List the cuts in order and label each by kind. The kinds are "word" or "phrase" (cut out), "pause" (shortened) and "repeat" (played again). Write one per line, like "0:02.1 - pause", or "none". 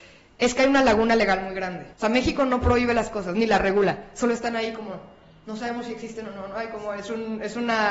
0:01.9 - pause

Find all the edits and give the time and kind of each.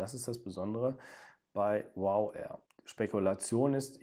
none

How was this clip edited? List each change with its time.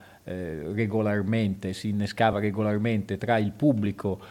none

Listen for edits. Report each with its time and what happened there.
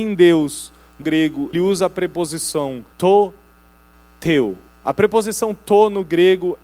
0:01.0 - word
0:01.5 - word
0:02.9 - pause
0:04.7 - pause

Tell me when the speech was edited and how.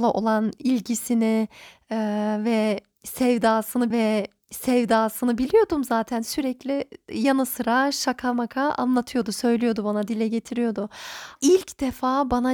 0:03.9 - repeat
0:11.4 - word

